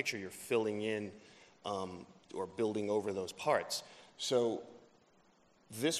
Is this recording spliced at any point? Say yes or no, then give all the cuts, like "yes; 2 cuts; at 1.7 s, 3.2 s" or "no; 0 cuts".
no; 0 cuts